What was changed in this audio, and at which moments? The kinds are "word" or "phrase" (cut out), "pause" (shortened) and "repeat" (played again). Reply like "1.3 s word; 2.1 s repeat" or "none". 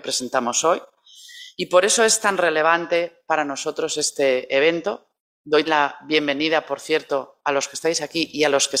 5.7 s word